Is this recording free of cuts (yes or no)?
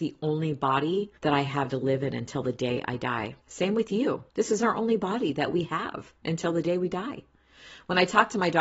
no